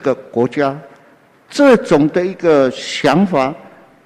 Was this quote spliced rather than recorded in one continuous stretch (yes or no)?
no